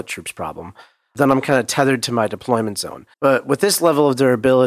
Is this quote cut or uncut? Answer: cut